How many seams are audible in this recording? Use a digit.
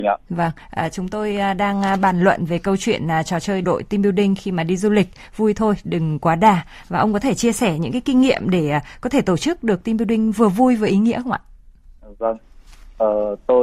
1